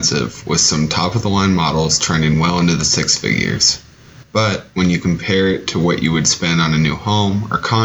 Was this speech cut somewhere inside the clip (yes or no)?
no